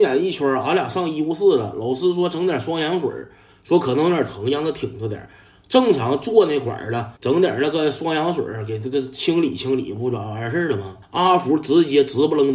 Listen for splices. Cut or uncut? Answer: cut